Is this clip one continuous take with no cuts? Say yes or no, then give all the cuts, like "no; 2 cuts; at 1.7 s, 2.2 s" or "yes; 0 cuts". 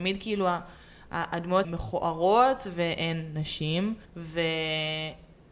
no; 2 cuts; at 1.6 s, 4.0 s